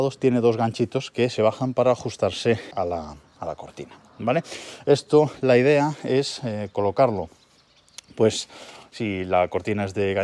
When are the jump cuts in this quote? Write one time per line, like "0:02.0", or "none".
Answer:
0:01.4
0:02.7